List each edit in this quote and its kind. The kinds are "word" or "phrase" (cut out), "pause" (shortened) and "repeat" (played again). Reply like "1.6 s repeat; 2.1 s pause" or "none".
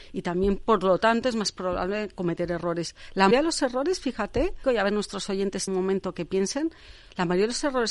3.3 s word; 4.6 s word; 5.7 s word